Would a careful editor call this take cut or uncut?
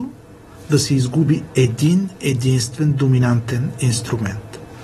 uncut